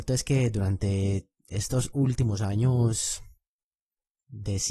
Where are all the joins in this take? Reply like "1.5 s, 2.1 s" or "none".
1.4 s